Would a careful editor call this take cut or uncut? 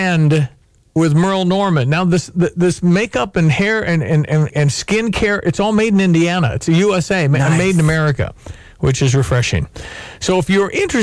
cut